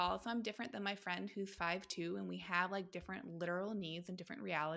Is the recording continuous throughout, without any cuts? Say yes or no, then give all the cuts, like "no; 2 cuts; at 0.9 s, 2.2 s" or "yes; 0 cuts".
yes; 0 cuts